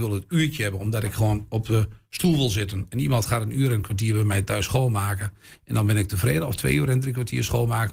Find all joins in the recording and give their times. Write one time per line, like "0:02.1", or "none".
none